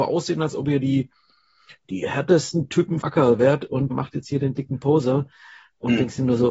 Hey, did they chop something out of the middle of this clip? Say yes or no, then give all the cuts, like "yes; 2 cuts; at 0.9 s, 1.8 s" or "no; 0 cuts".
yes; 2 cuts; at 3.0 s, 3.9 s